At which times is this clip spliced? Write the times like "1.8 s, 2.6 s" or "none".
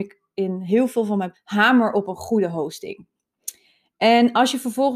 1.3 s